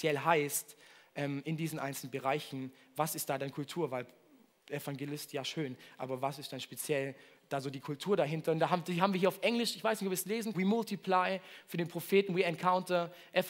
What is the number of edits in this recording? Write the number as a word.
one